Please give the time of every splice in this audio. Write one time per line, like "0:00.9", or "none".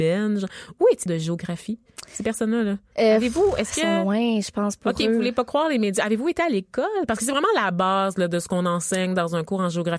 0:01.1